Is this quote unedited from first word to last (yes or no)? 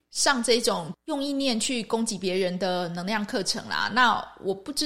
no